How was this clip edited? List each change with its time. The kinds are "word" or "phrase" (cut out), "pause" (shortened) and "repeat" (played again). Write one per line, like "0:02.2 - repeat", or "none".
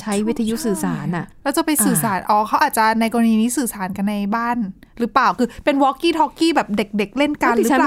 0:01.3 - pause